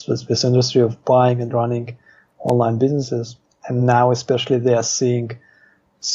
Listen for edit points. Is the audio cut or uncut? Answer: uncut